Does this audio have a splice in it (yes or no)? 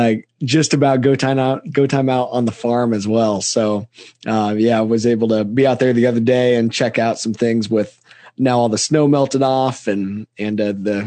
no